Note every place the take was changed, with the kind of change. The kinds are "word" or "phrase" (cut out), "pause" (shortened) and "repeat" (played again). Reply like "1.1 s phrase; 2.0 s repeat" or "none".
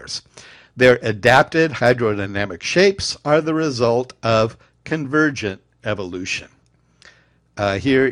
none